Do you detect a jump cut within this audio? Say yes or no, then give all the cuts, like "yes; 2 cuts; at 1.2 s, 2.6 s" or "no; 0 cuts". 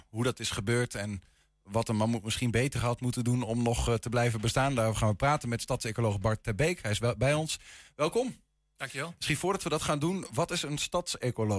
no; 0 cuts